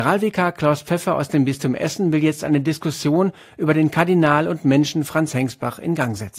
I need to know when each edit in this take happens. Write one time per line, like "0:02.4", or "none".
none